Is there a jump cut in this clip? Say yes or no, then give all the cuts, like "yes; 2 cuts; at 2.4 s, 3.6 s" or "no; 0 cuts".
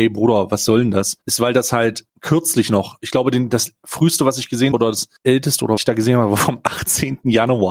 yes; 5 cuts; at 1.2 s, 2.1 s, 4.7 s, 5.2 s, 5.8 s